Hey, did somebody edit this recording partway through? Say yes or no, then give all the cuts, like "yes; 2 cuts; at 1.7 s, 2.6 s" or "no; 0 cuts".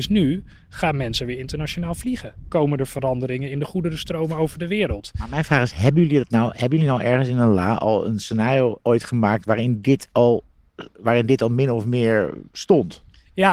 yes; 1 cut; at 12.5 s